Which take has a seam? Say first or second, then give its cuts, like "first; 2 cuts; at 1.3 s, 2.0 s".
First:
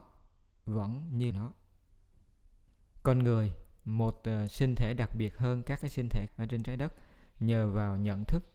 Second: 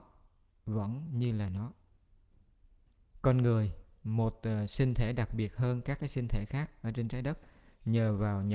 first; 2 cuts; at 1.3 s, 6.3 s